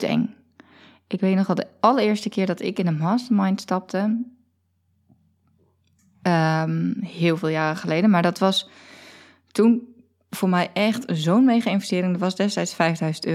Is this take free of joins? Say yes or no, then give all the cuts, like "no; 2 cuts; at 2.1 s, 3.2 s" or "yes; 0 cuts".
yes; 0 cuts